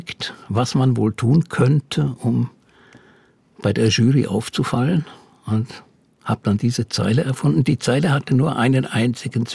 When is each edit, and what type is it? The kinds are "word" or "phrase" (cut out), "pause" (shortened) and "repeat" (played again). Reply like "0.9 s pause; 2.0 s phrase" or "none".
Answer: none